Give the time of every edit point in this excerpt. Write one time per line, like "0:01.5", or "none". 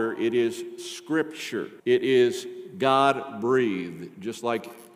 0:01.8